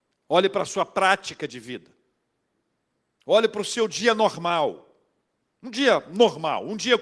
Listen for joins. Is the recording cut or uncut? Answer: uncut